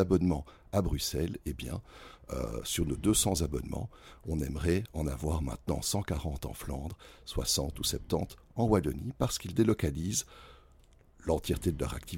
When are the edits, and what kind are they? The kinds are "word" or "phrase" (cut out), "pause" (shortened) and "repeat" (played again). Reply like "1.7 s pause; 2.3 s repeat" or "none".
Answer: none